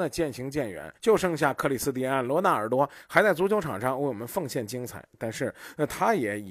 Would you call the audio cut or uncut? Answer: cut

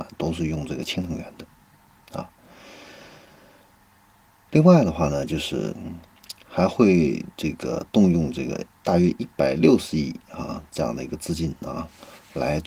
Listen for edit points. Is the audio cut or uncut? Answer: uncut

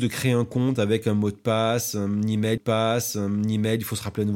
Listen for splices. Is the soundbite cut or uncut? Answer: cut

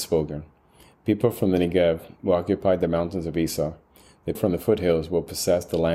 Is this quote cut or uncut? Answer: cut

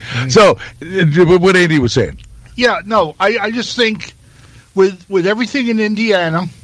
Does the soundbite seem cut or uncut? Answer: uncut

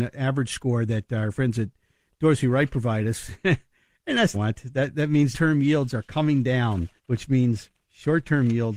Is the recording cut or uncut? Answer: cut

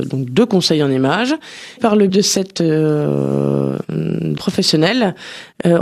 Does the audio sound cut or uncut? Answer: cut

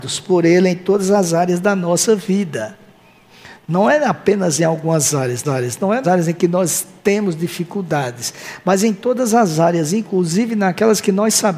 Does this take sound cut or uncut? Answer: cut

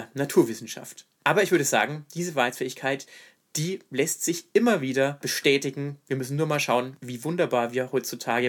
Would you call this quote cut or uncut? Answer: uncut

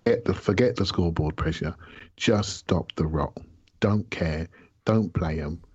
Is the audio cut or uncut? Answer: cut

